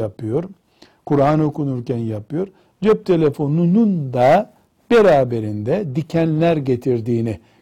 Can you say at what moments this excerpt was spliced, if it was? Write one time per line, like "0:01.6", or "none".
none